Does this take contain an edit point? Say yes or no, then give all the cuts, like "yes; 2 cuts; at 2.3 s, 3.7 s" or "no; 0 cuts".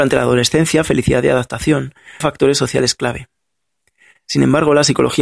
yes; 1 cut; at 2.2 s